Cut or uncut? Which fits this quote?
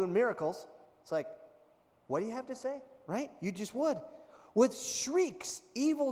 uncut